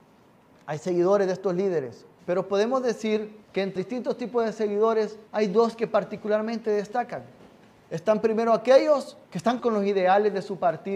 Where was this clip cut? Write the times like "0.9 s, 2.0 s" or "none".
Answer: 2.2 s, 3.4 s, 3.8 s, 5.3 s, 7.4 s, 9.2 s, 9.6 s

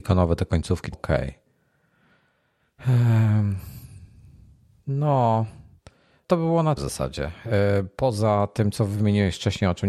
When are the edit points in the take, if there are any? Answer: 0.9 s, 6.2 s, 6.8 s

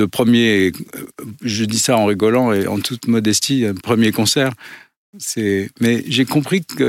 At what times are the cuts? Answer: none

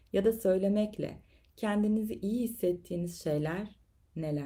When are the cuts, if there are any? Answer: none

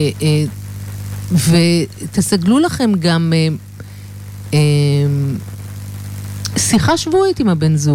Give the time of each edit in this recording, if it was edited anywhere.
none

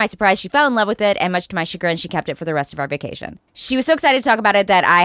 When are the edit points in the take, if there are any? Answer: 3.5 s

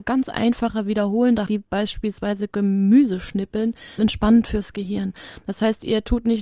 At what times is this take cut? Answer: 1.5 s, 4.0 s

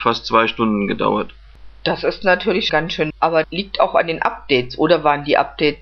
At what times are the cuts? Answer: 2.7 s, 3.1 s, 3.4 s

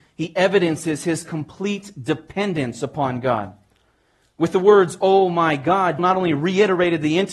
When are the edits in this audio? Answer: 6.0 s

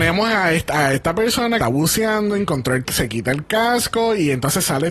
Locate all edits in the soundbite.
1.6 s, 2.8 s

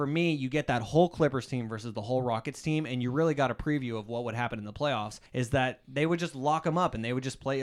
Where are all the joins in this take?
5.3 s

